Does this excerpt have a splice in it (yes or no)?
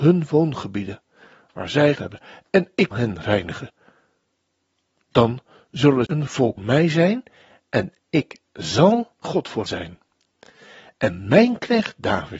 yes